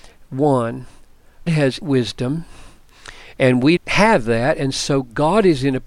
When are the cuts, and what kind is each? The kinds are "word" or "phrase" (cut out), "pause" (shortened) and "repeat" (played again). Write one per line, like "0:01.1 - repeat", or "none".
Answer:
0:01.5 - word
0:01.8 - word
0:03.8 - word